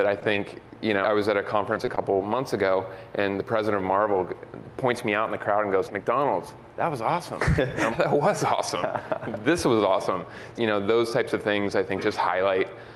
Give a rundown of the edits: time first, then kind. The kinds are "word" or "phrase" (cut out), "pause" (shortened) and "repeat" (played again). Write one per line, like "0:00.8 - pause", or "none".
0:01.0 - word
0:05.9 - word
0:07.9 - word
0:10.6 - word